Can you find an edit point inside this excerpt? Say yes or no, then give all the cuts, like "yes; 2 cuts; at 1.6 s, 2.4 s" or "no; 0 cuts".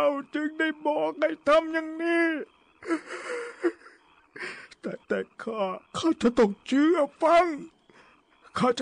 yes; 2 cuts; at 5.0 s, 5.9 s